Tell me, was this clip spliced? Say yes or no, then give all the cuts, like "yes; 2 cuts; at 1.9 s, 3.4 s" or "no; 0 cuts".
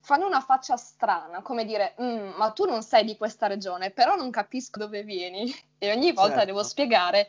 yes; 1 cut; at 4.8 s